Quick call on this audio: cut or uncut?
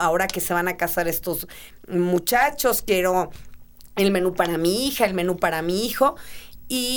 uncut